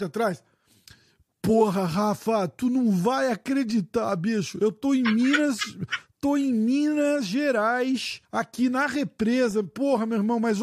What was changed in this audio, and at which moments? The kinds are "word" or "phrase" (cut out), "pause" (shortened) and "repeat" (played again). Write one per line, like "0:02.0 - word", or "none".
0:08.2 - pause